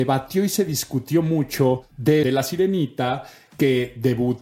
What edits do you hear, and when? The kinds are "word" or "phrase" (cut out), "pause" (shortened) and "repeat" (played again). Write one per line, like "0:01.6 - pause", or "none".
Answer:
0:02.2 - phrase